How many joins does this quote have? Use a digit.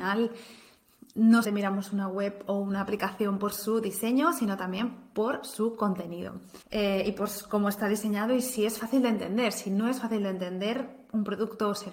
2